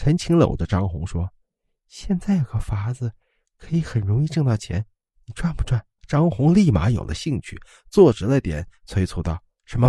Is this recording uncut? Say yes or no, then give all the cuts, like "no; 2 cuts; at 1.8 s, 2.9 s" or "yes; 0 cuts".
no; 1 cut; at 6.0 s